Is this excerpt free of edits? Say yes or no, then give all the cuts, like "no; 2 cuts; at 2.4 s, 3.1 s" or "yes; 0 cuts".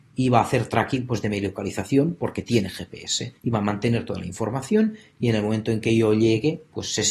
no; 1 cut; at 3.4 s